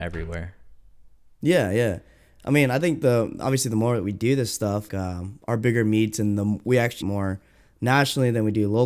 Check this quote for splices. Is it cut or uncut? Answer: cut